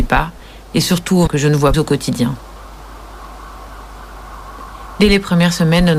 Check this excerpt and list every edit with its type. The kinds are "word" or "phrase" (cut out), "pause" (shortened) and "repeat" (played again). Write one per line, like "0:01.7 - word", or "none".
0:01.3 - word
0:01.7 - word